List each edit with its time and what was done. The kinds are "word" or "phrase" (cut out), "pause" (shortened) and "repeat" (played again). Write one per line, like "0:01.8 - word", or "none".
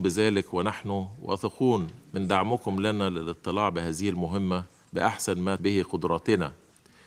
0:02.0 - pause
0:04.8 - pause
0:05.6 - word